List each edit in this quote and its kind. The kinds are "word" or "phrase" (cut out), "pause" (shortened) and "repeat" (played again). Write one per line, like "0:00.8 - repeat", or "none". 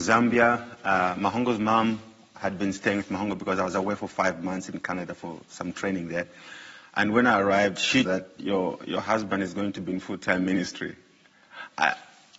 0:08.0 - phrase